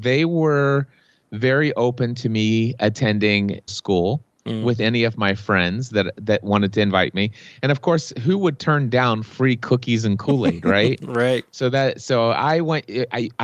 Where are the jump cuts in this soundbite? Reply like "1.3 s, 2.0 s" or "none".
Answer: 3.7 s